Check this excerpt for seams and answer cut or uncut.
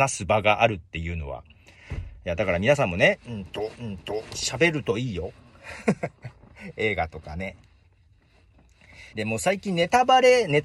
cut